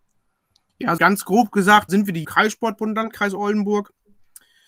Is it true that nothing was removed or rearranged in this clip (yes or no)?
no